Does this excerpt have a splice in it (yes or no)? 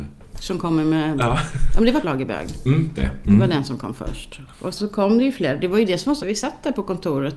yes